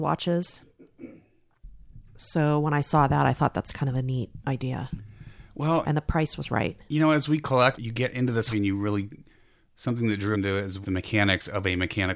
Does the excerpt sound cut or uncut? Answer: cut